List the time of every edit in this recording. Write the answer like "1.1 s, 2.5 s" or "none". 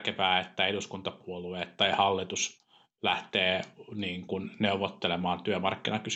none